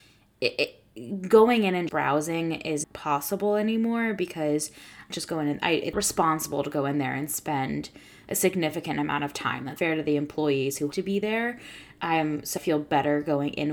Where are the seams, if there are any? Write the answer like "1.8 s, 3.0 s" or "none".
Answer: 1.9 s, 2.8 s, 5.1 s, 5.9 s, 9.8 s, 10.9 s, 12.6 s